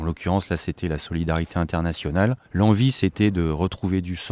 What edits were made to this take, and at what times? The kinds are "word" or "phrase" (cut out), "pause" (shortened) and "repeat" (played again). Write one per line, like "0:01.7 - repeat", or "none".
0:02.4 - pause